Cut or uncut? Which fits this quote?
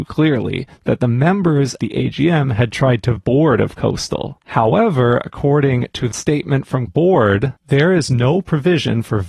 cut